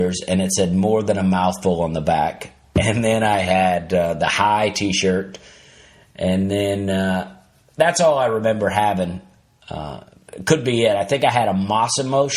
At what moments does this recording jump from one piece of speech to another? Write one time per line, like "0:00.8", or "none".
none